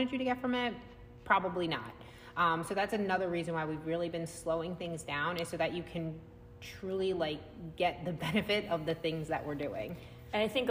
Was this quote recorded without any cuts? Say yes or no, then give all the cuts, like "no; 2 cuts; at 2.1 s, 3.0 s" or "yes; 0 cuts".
yes; 0 cuts